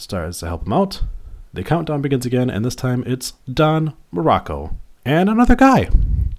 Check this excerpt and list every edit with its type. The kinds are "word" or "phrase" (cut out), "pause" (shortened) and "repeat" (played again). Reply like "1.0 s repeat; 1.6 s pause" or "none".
3.4 s pause